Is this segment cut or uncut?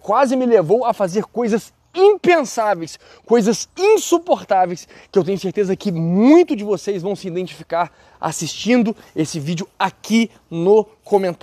uncut